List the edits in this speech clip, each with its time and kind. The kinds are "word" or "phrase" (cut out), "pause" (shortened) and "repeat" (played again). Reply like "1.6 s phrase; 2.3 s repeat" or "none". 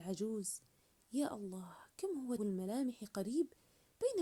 2.4 s word